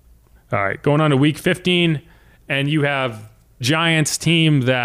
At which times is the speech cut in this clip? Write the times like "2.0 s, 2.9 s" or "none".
3.6 s